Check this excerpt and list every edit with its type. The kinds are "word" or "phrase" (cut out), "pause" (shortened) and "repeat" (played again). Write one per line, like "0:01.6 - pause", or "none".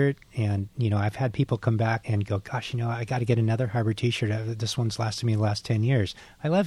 0:02.0 - word